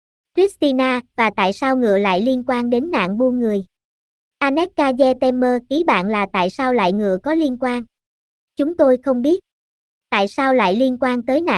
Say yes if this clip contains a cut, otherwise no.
no